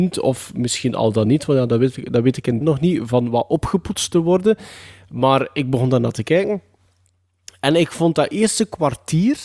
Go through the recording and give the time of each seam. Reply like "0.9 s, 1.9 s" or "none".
2.6 s